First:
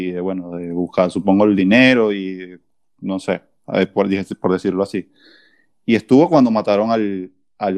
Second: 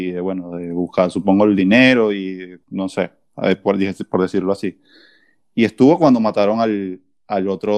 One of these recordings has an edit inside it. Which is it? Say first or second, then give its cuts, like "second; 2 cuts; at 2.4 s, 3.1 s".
second; 1 cut; at 2.6 s